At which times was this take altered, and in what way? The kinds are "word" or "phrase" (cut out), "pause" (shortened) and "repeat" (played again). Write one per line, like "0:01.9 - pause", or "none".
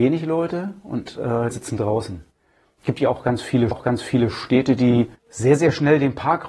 0:01.5 - phrase
0:03.7 - repeat
0:05.2 - pause